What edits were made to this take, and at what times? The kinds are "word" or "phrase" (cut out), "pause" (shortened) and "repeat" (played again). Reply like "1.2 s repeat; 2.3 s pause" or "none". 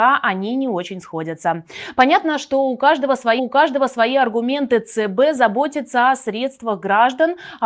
3.4 s repeat